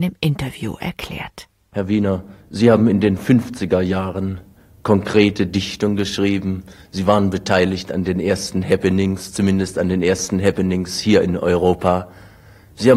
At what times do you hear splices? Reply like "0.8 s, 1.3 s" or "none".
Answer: none